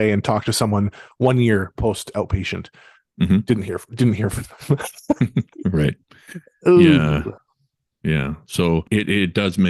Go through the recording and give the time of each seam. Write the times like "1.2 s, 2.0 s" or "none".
none